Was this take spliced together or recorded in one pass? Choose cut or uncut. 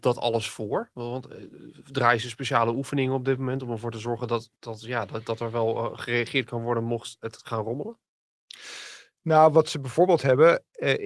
cut